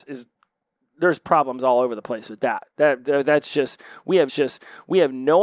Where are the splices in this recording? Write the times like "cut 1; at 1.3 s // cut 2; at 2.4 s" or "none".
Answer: cut 1; at 2.7 s // cut 2; at 4.3 s